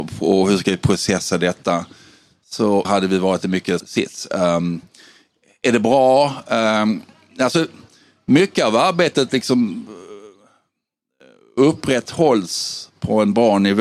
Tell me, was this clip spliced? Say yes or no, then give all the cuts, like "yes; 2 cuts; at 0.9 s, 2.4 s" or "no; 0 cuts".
yes; 2 cuts; at 2.8 s, 3.8 s